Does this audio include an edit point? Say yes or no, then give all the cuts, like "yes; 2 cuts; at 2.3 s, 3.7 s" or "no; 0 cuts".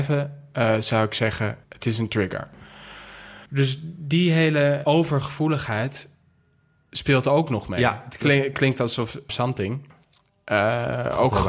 yes; 4 cuts; at 1.6 s, 3.5 s, 4.8 s, 9.3 s